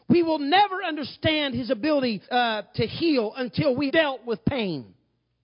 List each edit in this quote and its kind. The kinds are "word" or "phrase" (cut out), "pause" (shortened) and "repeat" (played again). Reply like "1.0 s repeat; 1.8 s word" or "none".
2.2 s pause; 3.9 s word